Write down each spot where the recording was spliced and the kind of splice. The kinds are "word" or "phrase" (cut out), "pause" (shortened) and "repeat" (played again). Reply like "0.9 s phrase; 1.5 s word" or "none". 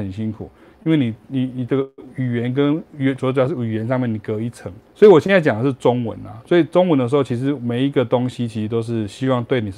4.9 s pause